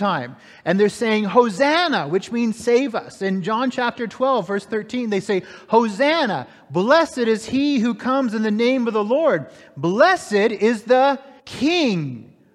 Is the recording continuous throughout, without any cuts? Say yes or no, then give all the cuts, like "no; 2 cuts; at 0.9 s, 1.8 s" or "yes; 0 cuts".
no; 1 cut; at 11.4 s